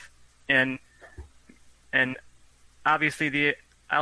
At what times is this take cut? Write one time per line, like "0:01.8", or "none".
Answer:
none